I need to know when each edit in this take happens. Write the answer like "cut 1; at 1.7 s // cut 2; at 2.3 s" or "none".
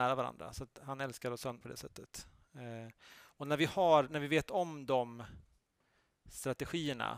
cut 1; at 1.6 s